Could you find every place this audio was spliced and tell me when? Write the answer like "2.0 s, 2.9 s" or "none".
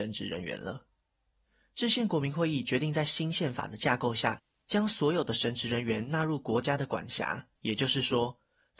7.6 s